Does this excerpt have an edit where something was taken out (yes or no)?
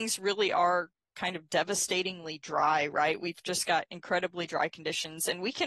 no